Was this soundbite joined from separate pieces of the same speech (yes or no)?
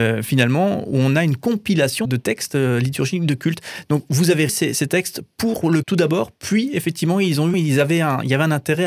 yes